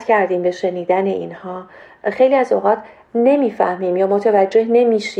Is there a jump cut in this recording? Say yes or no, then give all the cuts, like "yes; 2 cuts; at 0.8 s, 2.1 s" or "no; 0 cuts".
no; 0 cuts